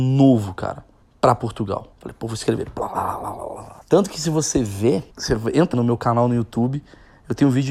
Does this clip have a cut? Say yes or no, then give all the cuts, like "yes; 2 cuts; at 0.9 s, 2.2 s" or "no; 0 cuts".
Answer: yes; 5 cuts; at 1.0 s, 1.9 s, 3.8 s, 5.1 s, 5.7 s